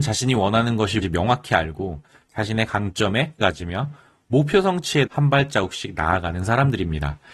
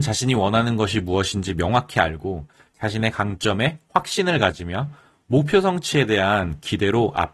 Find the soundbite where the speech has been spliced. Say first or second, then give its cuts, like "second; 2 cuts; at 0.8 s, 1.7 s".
first; 3 cuts; at 1.0 s, 3.4 s, 5.1 s